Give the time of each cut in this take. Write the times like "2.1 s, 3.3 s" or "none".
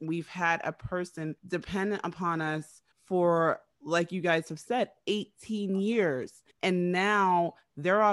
1.4 s, 2.9 s, 6.5 s